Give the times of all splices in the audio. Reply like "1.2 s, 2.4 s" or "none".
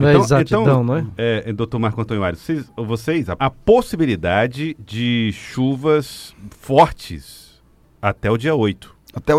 3.4 s